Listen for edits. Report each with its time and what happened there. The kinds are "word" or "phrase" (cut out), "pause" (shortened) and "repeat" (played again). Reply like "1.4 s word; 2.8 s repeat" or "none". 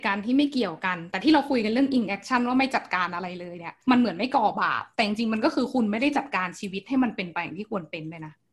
3.8 s pause